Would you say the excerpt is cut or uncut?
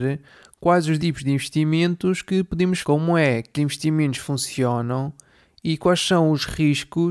cut